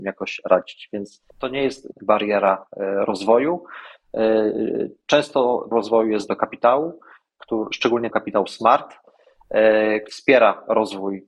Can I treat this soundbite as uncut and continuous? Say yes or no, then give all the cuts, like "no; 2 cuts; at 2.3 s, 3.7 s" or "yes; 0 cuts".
no; 6 cuts; at 1.3 s, 1.9 s, 5.7 s, 6.3 s, 8.1 s, 10.1 s